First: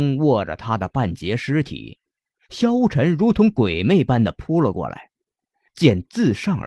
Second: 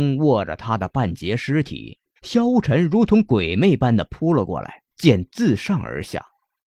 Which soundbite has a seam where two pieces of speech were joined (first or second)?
second